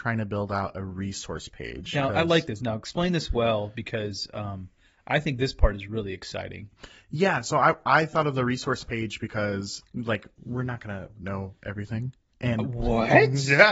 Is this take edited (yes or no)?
yes